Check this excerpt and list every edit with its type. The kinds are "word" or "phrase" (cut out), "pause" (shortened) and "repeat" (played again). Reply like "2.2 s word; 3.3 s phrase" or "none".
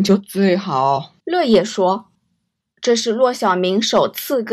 1.2 s pause; 2.1 s pause